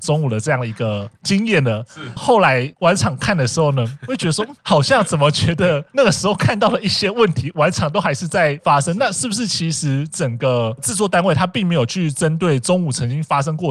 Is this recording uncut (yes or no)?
no